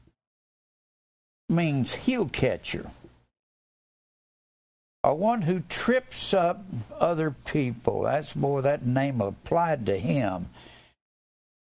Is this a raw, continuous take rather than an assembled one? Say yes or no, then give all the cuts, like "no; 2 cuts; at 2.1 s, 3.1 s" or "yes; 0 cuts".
yes; 0 cuts